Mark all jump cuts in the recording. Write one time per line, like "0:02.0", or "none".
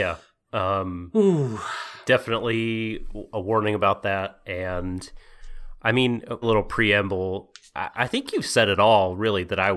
0:06.4

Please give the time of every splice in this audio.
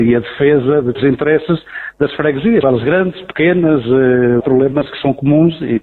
0:00.9
0:02.6
0:04.4

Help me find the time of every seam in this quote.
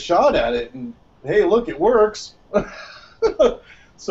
none

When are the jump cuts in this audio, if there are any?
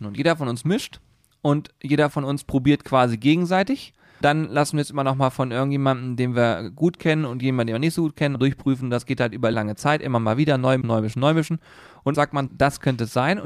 0:04.2
0:08.4
0:09.5
0:10.8
0:12.1
0:12.5

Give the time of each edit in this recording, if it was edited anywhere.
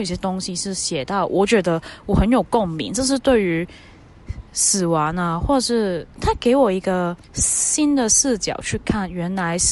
0:04.5
0:06.1
0:07.2

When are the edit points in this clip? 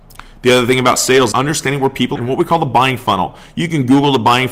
0:01.3
0:02.2

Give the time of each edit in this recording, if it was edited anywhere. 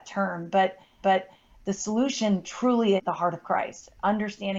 0:01.0
0:03.0

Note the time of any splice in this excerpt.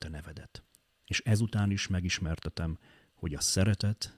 none

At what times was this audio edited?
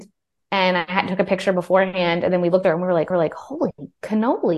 0:02.6
0:03.1

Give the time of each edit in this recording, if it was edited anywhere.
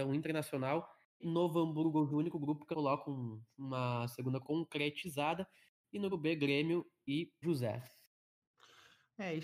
0:01.2
0:02.1
0:02.7
0:04.4
0:06.1
0:07.4

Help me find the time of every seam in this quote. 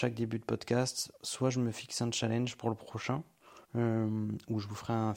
0:01.2
0:03.6

